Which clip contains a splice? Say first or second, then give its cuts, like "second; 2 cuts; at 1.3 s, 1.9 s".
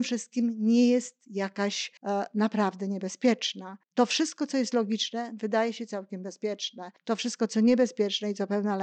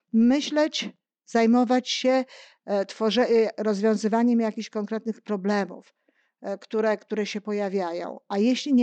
first; 3 cuts; at 2.0 s, 3.8 s, 7.0 s